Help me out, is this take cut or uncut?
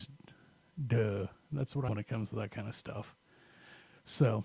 cut